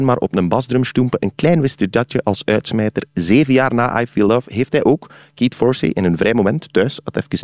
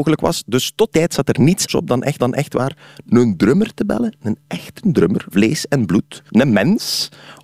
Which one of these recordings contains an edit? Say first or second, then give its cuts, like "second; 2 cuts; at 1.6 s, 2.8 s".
second; 5 cuts; at 0.9 s, 1.7 s, 2.2 s, 5.3 s, 6.3 s